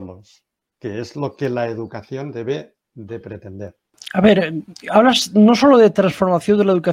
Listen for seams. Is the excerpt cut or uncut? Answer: uncut